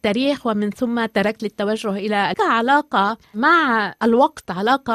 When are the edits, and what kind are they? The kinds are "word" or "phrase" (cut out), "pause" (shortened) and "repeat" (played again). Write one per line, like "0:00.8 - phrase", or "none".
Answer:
0:01.4 - word
0:02.3 - phrase